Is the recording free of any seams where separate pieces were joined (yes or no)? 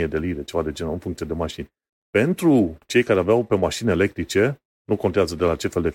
yes